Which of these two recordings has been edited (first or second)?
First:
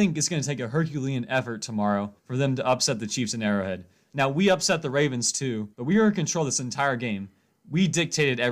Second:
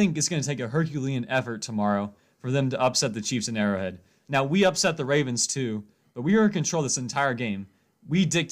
first